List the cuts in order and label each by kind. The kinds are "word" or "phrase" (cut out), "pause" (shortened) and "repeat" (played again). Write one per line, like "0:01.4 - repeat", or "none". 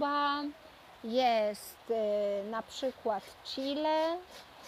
none